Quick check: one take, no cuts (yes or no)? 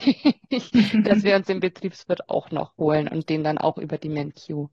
yes